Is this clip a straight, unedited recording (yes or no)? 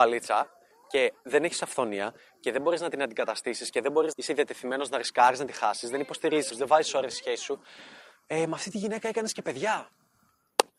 no